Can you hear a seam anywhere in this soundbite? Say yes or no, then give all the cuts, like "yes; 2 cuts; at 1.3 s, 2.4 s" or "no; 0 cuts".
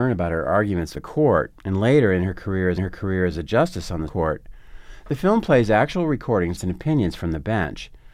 yes; 5 cuts; at 0.9 s, 1.6 s, 2.8 s, 4.1 s, 6.6 s